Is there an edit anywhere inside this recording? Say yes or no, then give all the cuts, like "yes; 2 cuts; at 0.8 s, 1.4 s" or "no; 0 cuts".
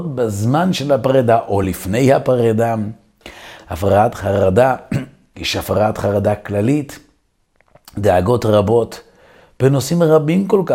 no; 0 cuts